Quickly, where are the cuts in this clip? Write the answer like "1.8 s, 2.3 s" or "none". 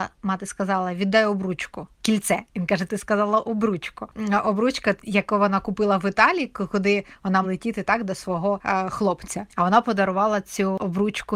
2.5 s, 7.4 s